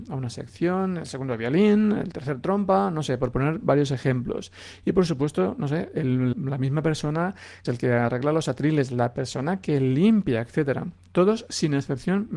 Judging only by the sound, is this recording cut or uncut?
cut